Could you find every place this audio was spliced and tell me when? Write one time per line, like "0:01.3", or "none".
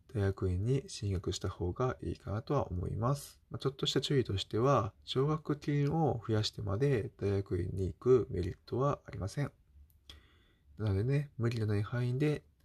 0:03.4
0:05.0